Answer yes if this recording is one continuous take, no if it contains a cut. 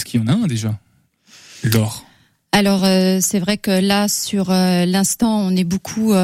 yes